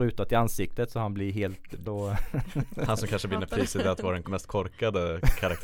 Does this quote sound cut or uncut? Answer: cut